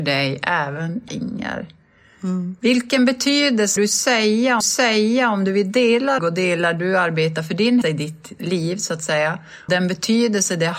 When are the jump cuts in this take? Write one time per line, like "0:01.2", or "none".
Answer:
0:01.1
0:03.8
0:04.6
0:06.2
0:07.8
0:09.7

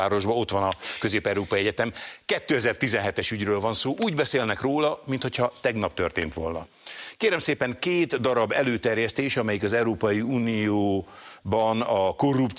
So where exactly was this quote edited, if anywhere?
none

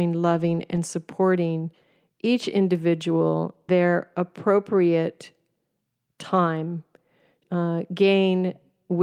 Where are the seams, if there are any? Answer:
0:03.7
0:07.4

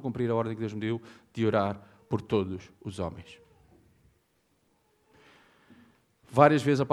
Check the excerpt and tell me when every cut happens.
none

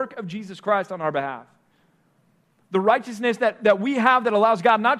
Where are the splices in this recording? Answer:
none

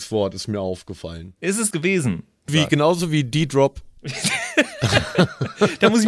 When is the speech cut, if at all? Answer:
0:01.7
0:02.5
0:04.0

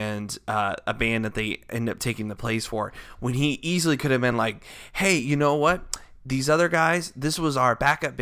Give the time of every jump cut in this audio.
none

